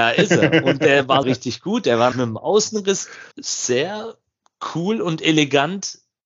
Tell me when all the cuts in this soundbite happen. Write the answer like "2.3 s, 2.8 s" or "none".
1.2 s, 2.1 s, 3.3 s